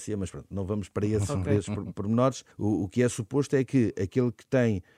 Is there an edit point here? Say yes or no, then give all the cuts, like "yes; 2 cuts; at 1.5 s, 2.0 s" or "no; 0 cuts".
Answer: yes; 1 cut; at 2.5 s